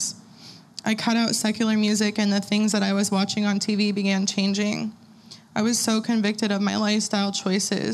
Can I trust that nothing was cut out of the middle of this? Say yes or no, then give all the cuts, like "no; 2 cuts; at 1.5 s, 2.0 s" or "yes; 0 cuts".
yes; 0 cuts